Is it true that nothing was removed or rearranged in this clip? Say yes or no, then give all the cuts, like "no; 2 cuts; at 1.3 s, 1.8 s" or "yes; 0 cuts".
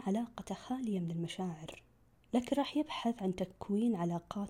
no; 1 cut; at 2.2 s